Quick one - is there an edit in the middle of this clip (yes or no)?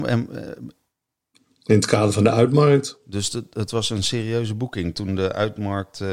no